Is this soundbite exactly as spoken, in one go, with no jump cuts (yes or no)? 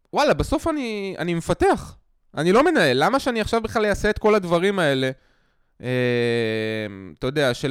yes